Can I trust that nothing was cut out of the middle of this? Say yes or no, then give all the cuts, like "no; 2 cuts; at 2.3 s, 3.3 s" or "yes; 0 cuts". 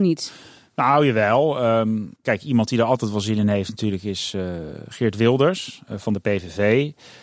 no; 1 cut; at 2.2 s